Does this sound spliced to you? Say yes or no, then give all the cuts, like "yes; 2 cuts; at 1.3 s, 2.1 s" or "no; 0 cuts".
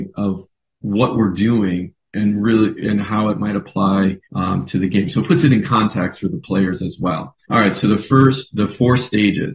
yes; 2 cuts; at 4.2 s, 7.4 s